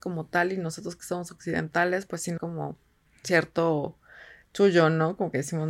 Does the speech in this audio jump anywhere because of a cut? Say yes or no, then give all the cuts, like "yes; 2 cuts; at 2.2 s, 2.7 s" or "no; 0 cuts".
yes; 2 cuts; at 2.4 s, 3.1 s